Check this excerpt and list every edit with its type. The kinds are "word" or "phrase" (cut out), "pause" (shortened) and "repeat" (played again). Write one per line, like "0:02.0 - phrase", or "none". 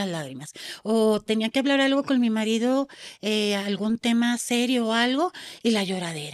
none